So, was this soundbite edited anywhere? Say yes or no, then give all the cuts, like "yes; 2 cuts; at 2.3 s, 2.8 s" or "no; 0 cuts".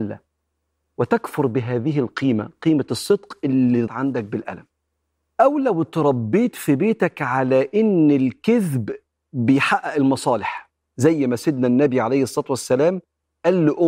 yes; 1 cut; at 3.9 s